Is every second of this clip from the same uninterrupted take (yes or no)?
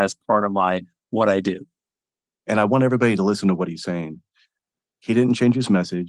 yes